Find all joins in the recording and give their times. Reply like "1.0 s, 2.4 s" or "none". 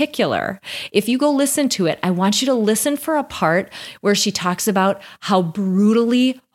none